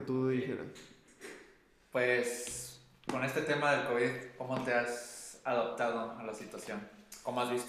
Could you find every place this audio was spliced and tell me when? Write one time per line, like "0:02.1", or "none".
none